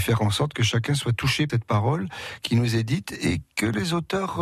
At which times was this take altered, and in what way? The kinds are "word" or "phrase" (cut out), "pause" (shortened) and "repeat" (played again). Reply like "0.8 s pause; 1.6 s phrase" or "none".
1.5 s word